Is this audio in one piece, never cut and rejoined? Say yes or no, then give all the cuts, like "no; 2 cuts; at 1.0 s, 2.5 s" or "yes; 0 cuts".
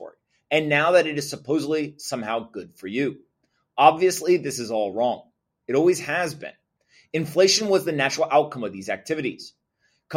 yes; 0 cuts